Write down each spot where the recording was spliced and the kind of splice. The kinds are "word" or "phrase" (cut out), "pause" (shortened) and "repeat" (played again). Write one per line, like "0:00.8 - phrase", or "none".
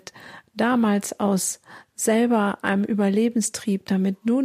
none